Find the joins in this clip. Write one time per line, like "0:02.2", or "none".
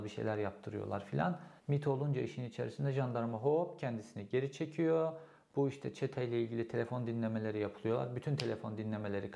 0:01.6